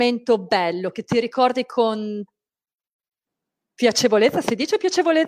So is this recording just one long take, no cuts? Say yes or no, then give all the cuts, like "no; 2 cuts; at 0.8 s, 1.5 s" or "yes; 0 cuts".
yes; 0 cuts